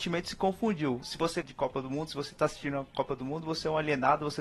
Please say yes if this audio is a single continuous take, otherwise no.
no